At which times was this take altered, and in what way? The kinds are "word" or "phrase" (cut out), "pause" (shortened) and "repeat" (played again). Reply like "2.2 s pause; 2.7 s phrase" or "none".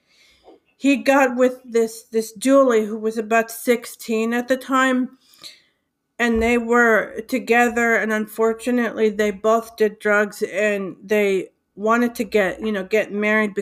none